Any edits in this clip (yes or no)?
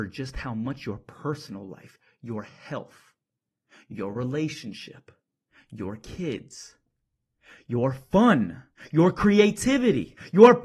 no